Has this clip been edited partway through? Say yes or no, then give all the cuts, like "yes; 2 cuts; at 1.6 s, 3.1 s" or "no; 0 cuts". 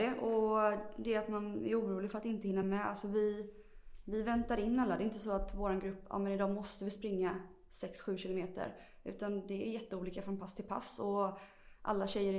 no; 0 cuts